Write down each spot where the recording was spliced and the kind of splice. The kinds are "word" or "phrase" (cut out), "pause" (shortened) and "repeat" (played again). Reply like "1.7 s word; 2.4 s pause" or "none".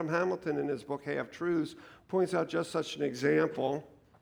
none

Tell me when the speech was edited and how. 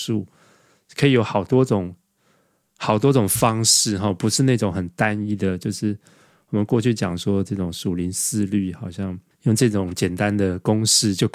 none

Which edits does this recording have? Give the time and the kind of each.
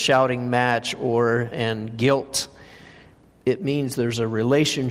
1.5 s phrase

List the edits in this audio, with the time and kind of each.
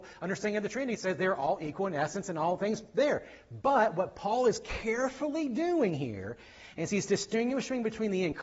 none

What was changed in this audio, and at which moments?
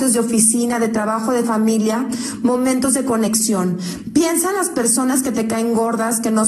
none

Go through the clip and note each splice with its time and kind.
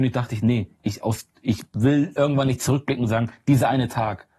none

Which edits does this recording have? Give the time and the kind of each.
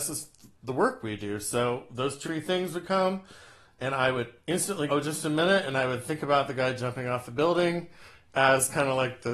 2.2 s word; 4.9 s word

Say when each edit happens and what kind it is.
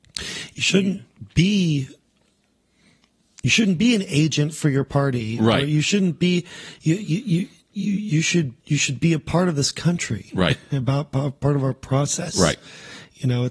8.6 s pause

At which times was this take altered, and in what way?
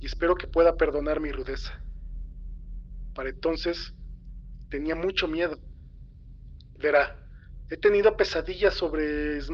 none

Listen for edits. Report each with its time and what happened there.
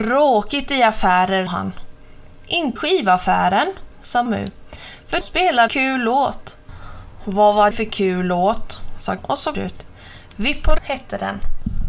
1.5 s word; 2.8 s word; 4.3 s word; 5.2 s word; 5.7 s word; 7.7 s word; 9.2 s word; 9.5 s word; 10.8 s word

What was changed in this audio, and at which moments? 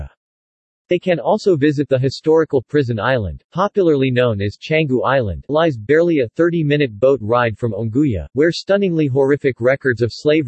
5.5 s word

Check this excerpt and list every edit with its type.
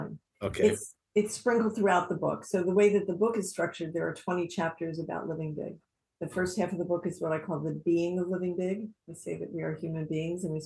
5.9 s pause; 9.0 s pause

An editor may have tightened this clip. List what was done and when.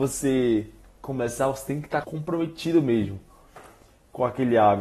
2.0 s word

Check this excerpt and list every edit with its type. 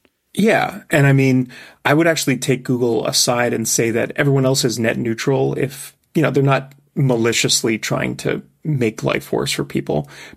none

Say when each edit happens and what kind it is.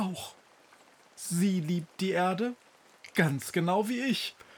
none

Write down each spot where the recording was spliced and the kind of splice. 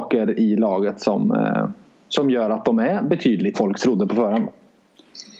1.9 s pause; 3.5 s phrase

